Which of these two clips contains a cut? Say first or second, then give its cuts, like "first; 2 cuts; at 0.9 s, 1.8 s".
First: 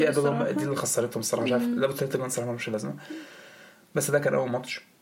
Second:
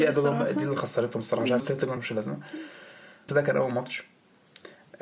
second; 3 cuts; at 1.6 s, 2.0 s, 3.3 s